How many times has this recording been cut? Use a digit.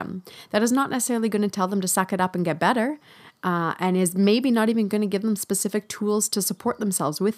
0